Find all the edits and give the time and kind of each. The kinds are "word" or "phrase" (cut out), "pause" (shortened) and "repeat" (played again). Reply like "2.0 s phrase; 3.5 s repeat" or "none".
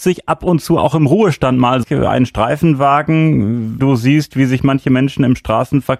1.8 s phrase; 3.8 s word